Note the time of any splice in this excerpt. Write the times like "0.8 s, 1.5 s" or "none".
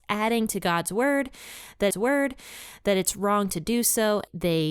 1.9 s